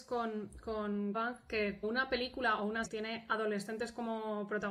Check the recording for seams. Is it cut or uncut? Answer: cut